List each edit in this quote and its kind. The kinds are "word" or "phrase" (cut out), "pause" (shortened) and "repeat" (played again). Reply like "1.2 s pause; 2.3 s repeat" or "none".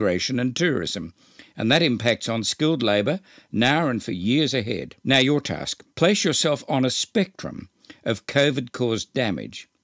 5.0 s pause; 5.9 s pause